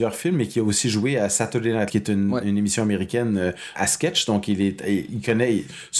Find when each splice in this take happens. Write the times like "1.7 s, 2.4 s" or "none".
1.9 s, 3.8 s, 5.1 s